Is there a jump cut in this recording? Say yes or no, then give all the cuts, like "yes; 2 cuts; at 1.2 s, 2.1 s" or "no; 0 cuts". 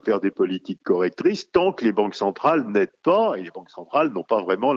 no; 0 cuts